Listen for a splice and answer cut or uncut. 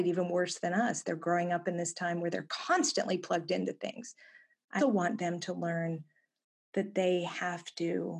cut